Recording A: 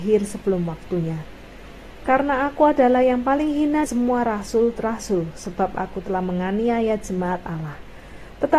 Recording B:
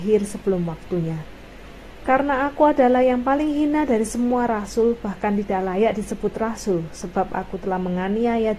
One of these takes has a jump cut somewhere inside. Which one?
A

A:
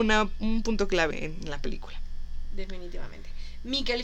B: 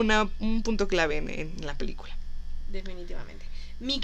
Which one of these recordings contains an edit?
A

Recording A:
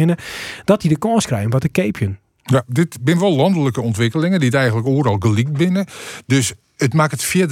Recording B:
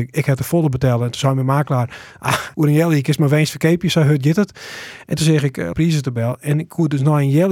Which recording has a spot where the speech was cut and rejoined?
B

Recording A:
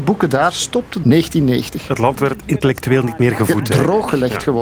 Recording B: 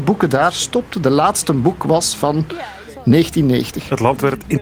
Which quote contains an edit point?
A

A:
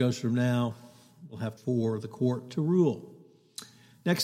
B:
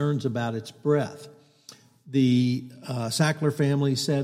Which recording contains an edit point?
A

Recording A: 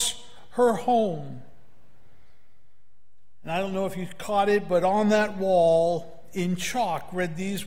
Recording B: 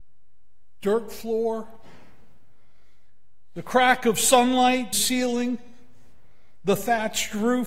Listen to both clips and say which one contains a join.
B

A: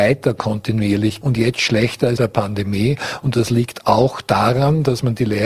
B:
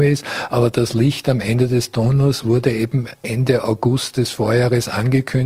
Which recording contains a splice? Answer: A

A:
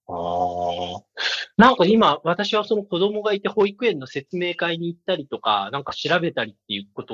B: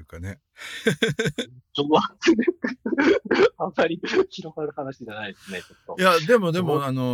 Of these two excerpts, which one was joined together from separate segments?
A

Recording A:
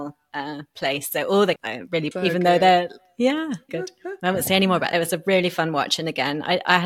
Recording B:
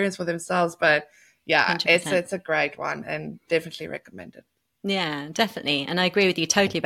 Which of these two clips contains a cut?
A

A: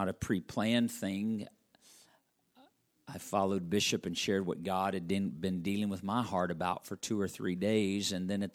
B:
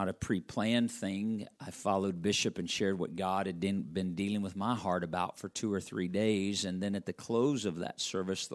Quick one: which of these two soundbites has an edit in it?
B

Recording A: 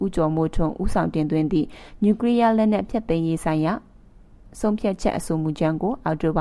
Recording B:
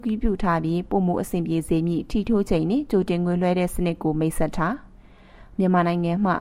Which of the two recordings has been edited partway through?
B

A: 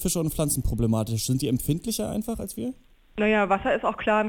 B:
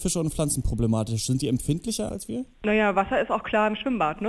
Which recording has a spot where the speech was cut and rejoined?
B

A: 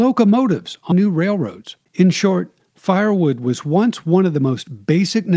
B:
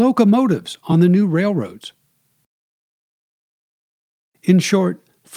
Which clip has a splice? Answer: A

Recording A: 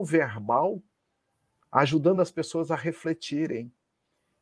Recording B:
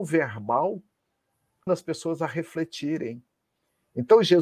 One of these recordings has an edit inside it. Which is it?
B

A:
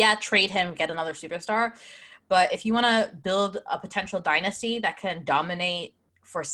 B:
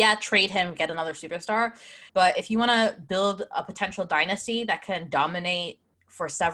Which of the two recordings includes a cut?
B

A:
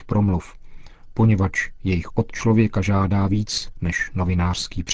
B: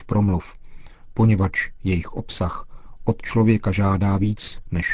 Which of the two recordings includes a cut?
A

